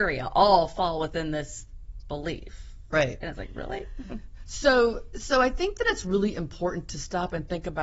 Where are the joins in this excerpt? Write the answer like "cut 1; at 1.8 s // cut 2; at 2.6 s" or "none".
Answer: none